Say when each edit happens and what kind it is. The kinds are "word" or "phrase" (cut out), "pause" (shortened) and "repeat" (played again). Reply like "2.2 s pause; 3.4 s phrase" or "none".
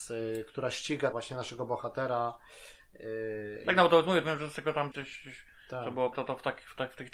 1.1 s word; 3.6 s word; 4.2 s word; 4.9 s word; 6.1 s word